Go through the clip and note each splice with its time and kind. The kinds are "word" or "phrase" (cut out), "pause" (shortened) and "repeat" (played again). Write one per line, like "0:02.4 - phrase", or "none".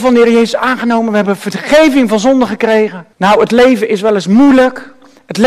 0:03.1 - pause